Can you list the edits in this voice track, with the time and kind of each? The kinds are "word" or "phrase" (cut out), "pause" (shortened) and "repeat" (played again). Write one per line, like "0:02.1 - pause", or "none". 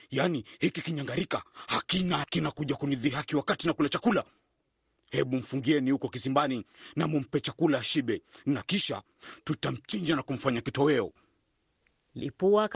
0:02.2 - word